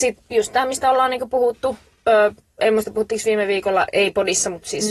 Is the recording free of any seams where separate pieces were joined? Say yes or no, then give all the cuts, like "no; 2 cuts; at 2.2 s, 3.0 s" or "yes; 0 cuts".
yes; 0 cuts